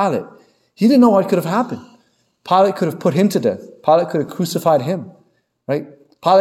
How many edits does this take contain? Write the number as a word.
zero